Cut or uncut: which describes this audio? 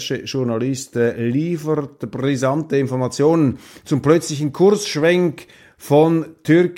uncut